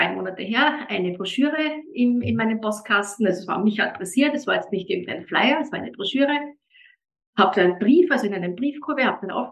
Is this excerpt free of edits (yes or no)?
yes